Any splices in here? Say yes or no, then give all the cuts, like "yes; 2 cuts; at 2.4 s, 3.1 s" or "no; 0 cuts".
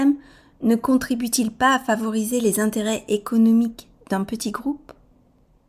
no; 0 cuts